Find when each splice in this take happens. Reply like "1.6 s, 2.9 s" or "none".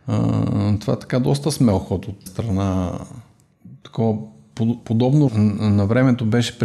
2.3 s, 5.3 s